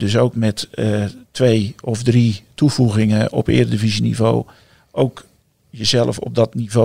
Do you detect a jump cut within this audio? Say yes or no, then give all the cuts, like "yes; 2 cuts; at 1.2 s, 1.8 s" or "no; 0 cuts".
no; 0 cuts